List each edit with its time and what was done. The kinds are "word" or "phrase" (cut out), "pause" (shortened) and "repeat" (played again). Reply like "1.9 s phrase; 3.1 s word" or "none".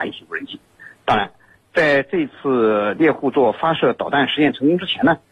none